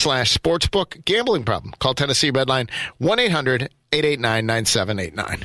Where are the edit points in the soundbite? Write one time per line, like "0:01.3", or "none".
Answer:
none